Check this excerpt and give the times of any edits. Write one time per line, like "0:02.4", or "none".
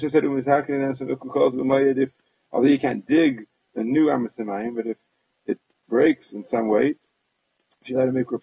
none